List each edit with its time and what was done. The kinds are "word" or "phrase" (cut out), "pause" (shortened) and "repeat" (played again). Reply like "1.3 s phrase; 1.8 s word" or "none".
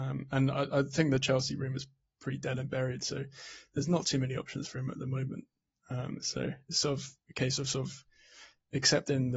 none